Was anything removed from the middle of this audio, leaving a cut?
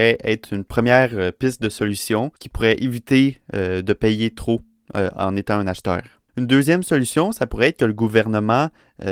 yes; 2 cuts; at 2.4 s, 6.3 s

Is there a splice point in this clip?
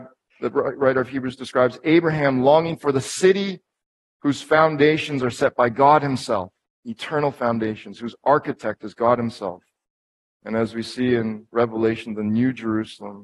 no; 0 cuts

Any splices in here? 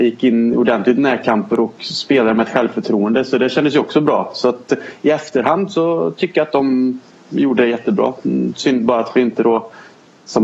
no; 0 cuts

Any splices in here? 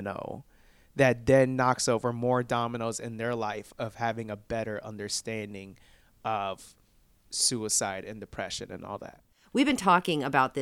no; 0 cuts

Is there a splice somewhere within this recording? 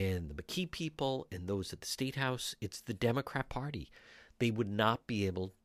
no; 0 cuts

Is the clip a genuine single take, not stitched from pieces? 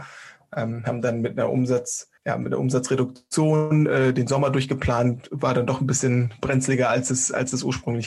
no; 1 cut; at 2.2 s

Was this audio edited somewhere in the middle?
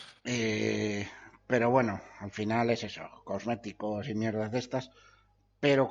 no; 0 cuts

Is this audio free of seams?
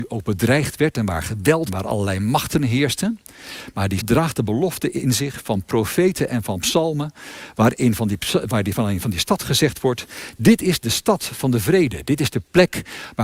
no; 2 cuts; at 1.7 s, 4.0 s

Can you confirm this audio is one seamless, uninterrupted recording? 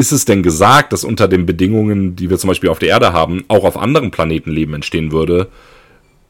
yes; 0 cuts

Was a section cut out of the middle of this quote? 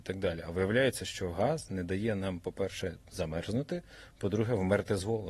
no; 0 cuts

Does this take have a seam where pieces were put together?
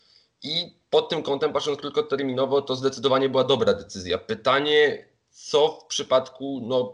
no; 0 cuts

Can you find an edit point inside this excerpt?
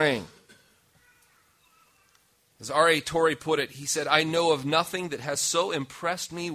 no; 0 cuts

